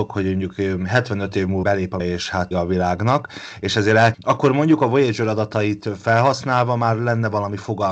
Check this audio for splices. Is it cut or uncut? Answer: cut